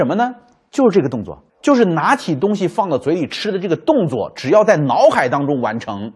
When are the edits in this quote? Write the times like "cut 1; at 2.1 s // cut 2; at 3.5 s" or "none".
cut 1; at 1.5 s